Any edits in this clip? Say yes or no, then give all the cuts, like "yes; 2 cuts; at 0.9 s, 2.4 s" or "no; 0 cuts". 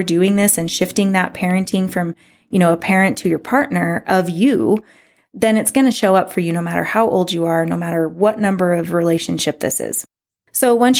no; 0 cuts